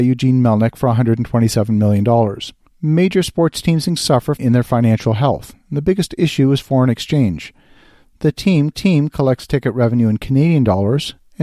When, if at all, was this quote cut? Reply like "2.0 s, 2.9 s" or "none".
2.7 s, 4.0 s, 4.4 s, 8.7 s